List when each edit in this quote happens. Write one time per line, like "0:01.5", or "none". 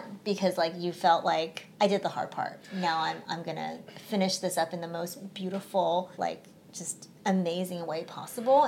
0:01.7
0:03.9
0:06.1
0:07.2